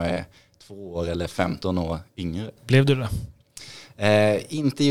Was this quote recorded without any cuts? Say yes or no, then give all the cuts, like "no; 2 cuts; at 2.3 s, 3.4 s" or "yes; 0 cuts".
no; 1 cut; at 2.6 s